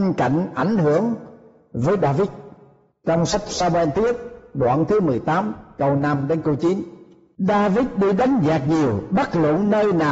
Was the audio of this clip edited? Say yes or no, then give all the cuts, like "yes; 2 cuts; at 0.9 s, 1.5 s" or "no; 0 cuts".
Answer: no; 0 cuts